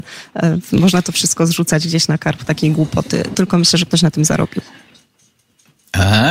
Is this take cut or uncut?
cut